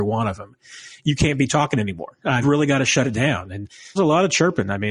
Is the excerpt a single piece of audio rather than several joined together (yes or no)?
no